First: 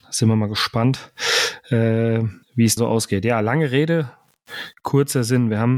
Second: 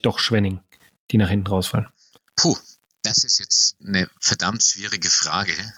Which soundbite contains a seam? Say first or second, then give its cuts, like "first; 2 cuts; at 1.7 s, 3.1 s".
first; 2 cuts; at 2.4 s, 2.8 s